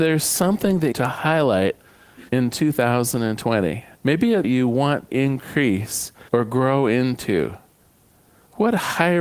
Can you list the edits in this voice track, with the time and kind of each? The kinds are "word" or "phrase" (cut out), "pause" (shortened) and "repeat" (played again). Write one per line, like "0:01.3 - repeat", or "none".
0:00.9 - phrase
0:02.3 - pause
0:03.9 - pause
0:04.4 - phrase
0:05.1 - word
0:06.3 - pause